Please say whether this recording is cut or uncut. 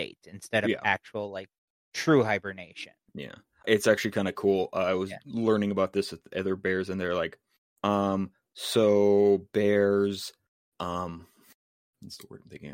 cut